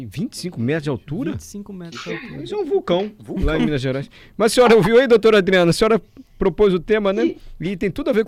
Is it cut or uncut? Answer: uncut